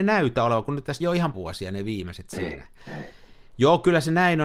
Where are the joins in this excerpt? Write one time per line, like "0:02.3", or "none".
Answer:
0:01.0
0:01.3